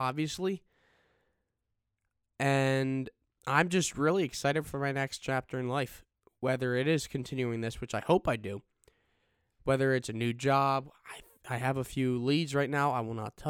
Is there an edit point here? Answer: no; 0 cuts

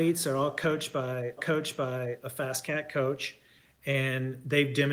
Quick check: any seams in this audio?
yes; 1 cut; at 1.4 s

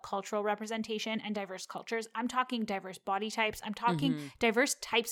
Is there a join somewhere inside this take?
no; 0 cuts

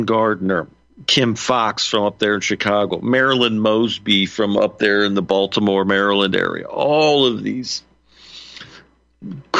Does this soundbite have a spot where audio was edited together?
no; 0 cuts

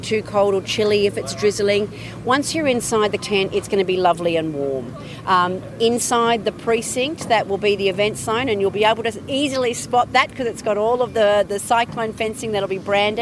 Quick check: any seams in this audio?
yes; 1 cut; at 3.2 s

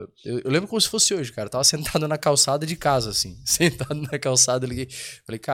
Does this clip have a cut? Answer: no; 0 cuts

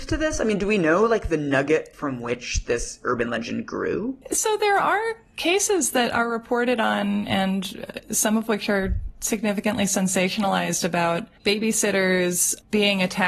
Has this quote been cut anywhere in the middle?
yes; 1 cut; at 11.4 s

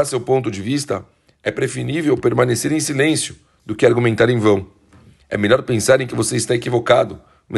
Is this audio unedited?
yes; 0 cuts

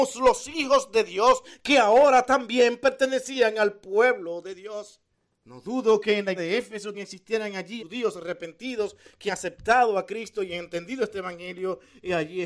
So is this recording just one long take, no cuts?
no; 5 cuts; at 5.1 s, 6.4 s, 6.9 s, 7.8 s, 9.3 s

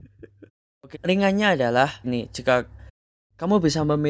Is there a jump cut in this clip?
yes; 2 cuts; at 0.9 s, 2.0 s

